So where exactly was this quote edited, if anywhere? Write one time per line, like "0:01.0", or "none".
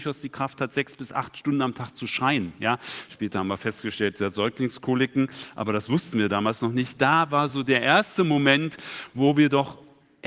none